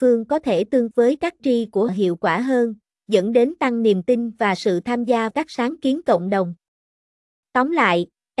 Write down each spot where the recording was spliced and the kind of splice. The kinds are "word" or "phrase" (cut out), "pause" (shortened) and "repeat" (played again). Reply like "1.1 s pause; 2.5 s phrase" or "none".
0.9 s word; 1.4 s word; 1.9 s word; 5.3 s word